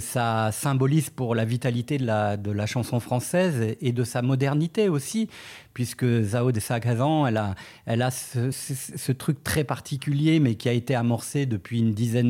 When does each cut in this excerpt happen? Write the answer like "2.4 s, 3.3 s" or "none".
8.5 s

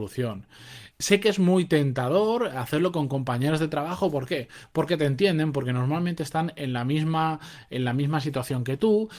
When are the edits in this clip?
0.9 s

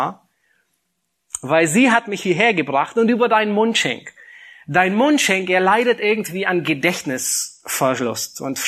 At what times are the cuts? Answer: none

